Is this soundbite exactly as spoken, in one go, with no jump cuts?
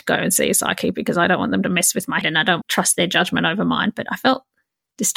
no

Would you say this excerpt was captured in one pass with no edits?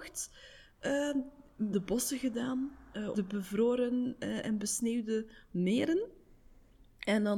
no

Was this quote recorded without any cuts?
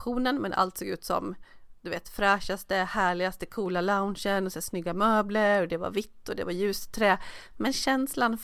yes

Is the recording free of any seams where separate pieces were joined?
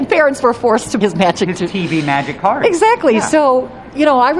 no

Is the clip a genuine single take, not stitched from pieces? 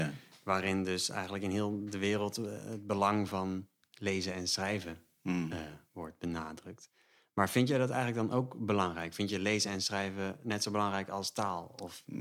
yes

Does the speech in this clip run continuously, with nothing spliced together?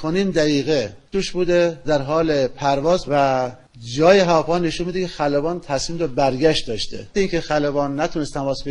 no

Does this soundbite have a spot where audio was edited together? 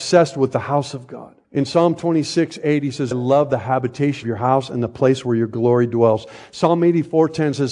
yes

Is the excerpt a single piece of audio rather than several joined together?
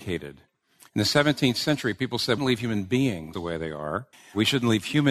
no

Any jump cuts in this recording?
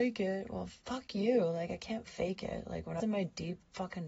yes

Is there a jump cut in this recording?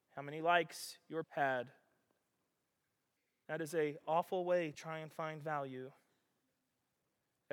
yes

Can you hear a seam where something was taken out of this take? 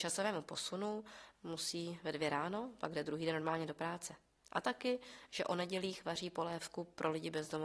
yes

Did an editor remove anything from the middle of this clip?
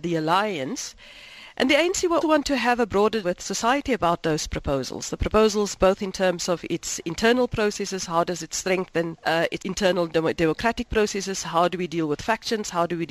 yes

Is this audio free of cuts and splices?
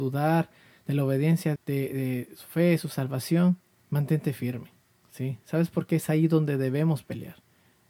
no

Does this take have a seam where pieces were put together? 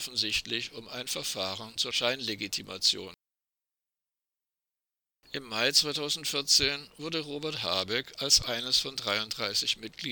no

